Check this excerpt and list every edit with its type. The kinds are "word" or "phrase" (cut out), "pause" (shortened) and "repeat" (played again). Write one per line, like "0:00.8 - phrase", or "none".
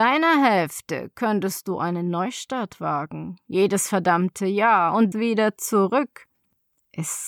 0:05.1 - phrase